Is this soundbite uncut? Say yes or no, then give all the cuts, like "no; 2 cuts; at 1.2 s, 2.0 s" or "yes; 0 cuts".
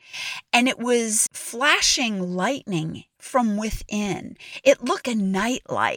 no; 1 cut; at 5.0 s